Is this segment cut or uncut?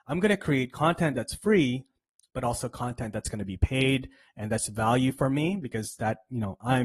uncut